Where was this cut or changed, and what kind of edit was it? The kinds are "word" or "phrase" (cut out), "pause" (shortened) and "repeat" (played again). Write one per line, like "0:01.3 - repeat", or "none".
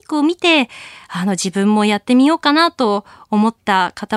none